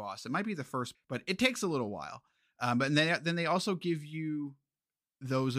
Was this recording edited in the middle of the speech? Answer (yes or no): yes